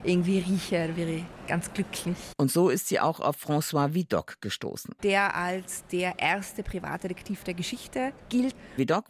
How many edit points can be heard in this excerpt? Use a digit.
0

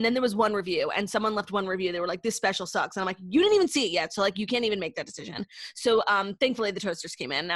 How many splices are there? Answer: 0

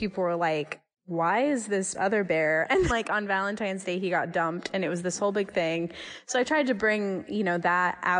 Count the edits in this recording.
3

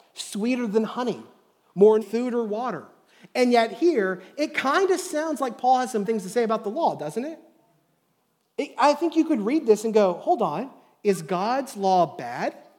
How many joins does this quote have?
2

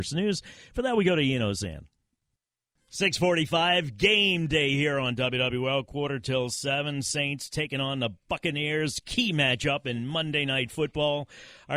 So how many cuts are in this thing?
0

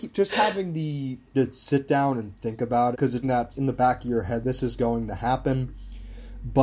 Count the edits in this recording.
5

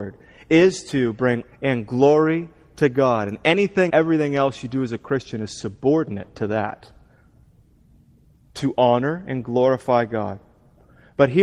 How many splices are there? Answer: 2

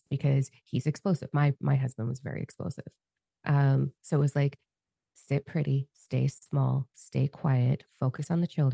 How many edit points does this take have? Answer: 0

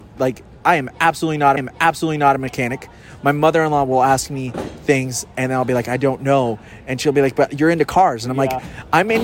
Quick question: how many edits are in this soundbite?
1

